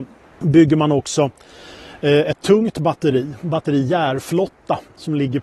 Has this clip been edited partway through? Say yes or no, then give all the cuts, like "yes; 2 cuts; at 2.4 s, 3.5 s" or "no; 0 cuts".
no; 0 cuts